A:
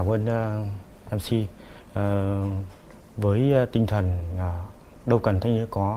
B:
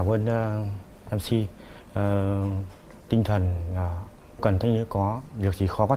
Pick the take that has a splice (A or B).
B